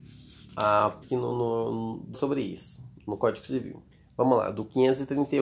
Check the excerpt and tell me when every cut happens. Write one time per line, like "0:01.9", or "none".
0:01.0
0:02.1
0:03.0
0:03.9